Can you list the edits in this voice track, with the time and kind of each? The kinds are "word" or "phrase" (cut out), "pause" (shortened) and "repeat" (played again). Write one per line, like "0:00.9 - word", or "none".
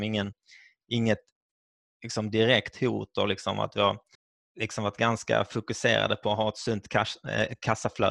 0:04.1 - pause